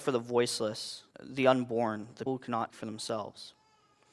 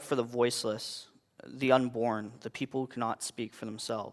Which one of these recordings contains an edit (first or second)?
first